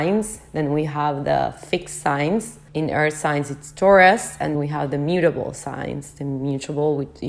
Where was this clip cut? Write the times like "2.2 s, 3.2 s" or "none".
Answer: 2.7 s, 4.5 s